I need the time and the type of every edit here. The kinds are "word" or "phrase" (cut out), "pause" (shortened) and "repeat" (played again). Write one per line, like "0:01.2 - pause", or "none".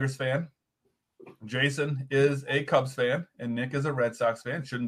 none